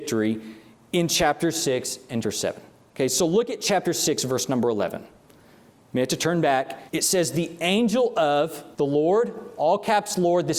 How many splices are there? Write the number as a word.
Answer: three